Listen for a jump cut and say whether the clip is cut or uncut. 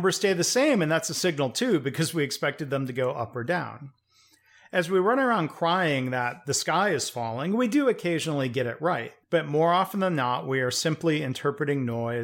cut